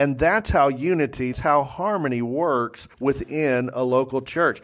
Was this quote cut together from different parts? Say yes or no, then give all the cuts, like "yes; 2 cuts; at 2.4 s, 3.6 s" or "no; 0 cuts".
yes; 2 cuts; at 1.3 s, 2.9 s